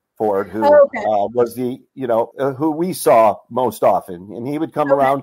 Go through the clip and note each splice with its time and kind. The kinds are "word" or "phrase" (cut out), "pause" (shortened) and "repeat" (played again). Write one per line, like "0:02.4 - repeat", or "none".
0:02.3 - word